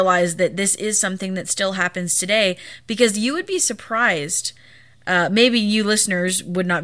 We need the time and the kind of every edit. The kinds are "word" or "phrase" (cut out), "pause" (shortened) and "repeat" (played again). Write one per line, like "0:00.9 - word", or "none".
none